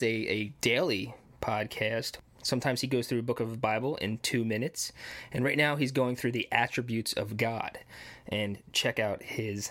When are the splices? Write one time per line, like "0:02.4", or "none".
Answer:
none